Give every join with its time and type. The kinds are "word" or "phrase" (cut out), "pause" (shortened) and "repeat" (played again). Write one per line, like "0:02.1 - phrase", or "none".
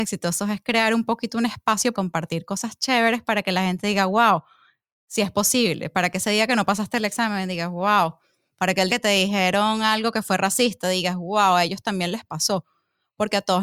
0:01.9 - word
0:08.9 - word